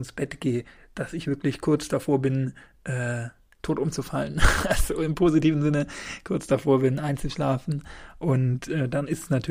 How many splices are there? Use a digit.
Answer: 0